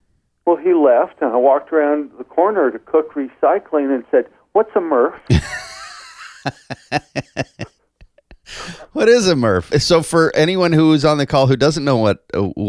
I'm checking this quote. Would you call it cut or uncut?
uncut